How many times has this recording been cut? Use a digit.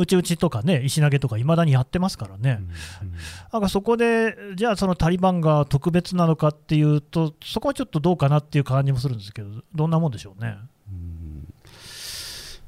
1